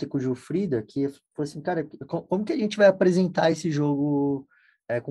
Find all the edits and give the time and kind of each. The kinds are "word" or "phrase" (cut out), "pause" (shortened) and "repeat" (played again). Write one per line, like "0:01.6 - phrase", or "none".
none